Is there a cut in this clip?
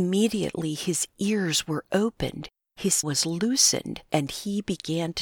yes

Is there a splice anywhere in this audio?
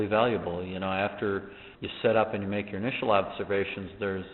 yes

